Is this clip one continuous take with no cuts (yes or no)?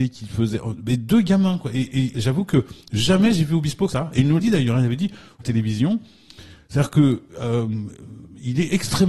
no